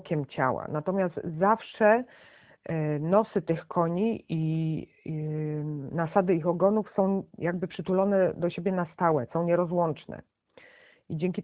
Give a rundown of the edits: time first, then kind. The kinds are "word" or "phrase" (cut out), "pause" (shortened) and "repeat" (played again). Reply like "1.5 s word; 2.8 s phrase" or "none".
none

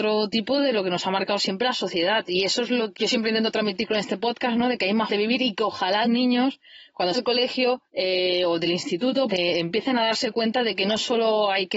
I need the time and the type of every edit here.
2.9 s word; 5.1 s word; 6.0 s word; 7.1 s word; 7.9 s pause; 9.3 s word

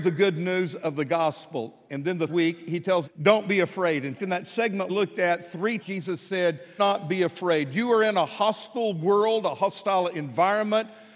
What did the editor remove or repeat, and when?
2.3 s word; 3.0 s word; 4.2 s word; 4.9 s word; 5.8 s word; 6.8 s word

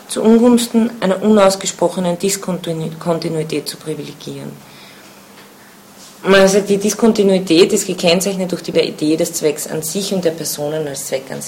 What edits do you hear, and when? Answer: 8.7 s phrase

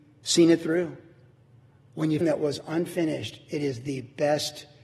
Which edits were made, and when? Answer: 1.3 s pause; 2.2 s phrase

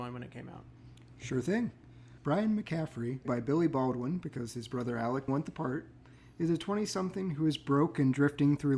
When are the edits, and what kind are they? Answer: 3.2 s word; 5.3 s word

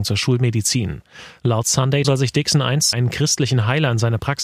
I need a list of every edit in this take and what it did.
2.0 s word; 2.9 s word

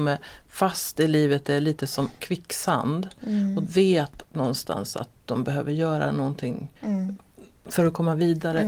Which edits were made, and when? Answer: 3.6 s word; 4.2 s word; 6.8 s pause

